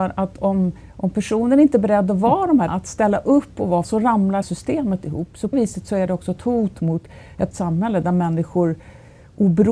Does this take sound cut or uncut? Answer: cut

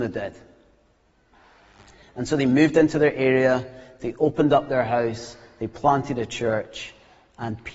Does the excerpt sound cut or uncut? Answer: uncut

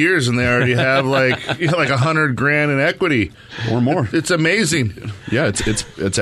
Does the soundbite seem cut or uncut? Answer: uncut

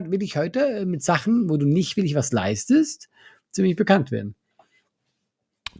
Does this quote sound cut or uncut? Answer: uncut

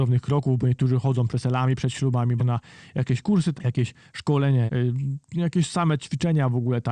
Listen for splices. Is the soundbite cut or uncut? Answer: cut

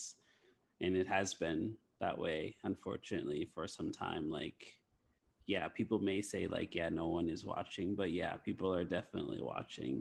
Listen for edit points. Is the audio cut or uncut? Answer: uncut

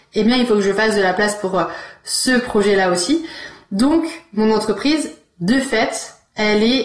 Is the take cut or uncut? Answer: uncut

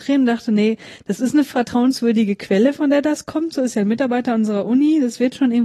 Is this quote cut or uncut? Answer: uncut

